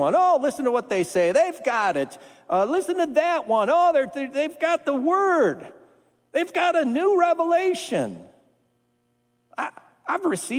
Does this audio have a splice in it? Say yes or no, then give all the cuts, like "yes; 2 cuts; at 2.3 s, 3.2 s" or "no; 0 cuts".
no; 0 cuts